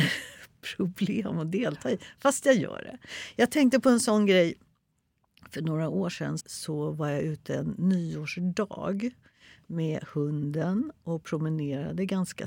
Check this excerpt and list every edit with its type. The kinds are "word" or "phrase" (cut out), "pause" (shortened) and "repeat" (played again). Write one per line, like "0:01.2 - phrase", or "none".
0:06.4 - word